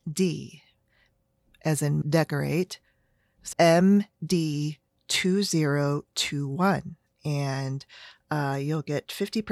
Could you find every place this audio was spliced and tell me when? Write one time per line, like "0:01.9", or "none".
0:02.0
0:03.5